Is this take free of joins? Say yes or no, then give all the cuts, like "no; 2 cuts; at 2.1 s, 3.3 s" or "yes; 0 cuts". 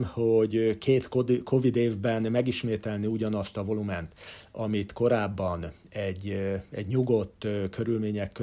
yes; 0 cuts